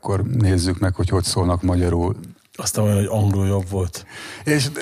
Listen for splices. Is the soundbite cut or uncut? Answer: uncut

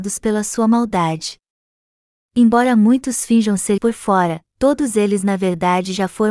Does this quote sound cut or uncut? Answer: cut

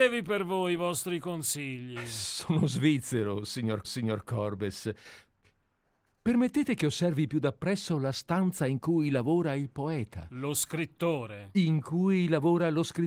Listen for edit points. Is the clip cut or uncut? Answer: cut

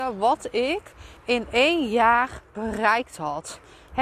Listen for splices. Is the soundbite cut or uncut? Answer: cut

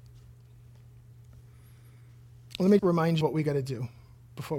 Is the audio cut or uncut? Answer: cut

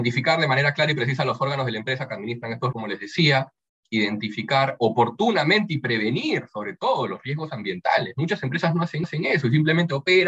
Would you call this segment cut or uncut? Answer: cut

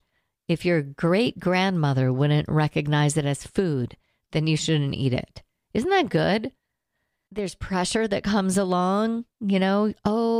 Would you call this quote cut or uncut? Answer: uncut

